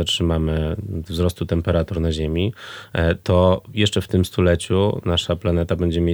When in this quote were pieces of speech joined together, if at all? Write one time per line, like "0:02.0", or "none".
none